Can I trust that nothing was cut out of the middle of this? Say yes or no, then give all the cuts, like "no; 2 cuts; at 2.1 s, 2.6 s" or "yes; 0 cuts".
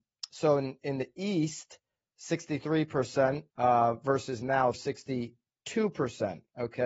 no; 2 cuts; at 3.5 s, 4.7 s